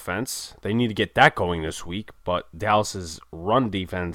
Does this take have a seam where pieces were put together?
no; 0 cuts

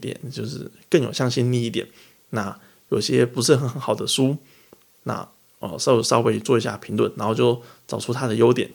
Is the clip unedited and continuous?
yes; 0 cuts

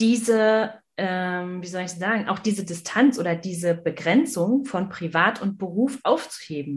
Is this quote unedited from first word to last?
yes; 0 cuts

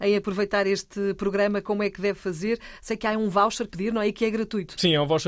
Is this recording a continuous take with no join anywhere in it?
no; 1 cut; at 3.7 s

